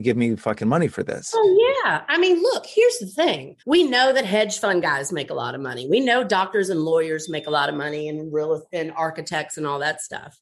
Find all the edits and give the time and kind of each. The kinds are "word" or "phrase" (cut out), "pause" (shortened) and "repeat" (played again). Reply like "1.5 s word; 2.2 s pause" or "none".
3.6 s pause